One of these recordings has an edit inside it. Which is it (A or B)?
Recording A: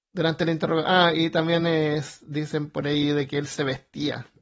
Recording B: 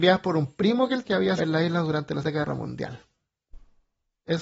B